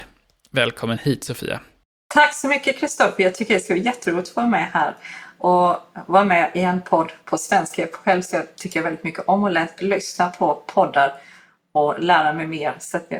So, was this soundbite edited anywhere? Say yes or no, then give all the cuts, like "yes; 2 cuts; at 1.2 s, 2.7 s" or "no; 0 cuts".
no; 0 cuts